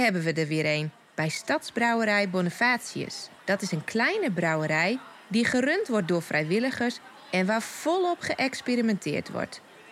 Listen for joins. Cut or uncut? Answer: cut